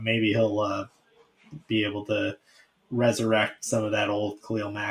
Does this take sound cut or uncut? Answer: uncut